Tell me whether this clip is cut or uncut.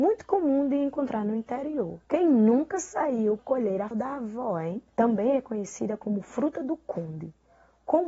cut